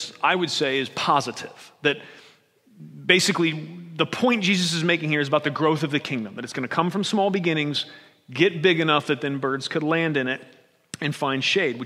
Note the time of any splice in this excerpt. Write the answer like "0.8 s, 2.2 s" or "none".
none